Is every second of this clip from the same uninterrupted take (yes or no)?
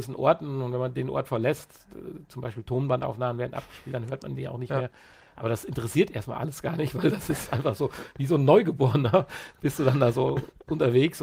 yes